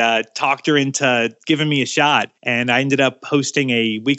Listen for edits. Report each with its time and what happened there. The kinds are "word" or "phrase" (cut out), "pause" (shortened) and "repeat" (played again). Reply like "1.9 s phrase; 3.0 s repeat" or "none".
2.4 s pause